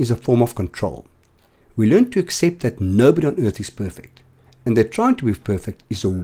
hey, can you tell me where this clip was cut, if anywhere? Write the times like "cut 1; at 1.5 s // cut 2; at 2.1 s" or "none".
none